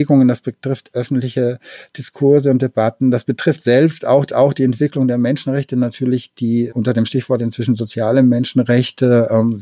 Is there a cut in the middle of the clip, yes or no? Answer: yes